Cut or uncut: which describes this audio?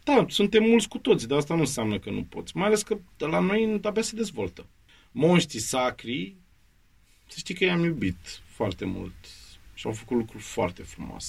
uncut